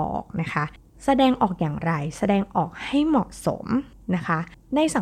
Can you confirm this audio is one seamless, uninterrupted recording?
yes; 0 cuts

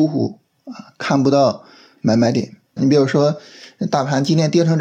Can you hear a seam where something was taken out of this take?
yes; 1 cut; at 2.8 s

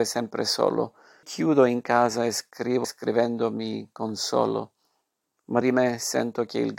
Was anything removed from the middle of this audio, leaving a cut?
yes; 3 cuts; at 1.2 s, 2.8 s, 5.6 s

